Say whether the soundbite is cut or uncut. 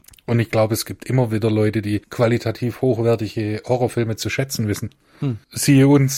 uncut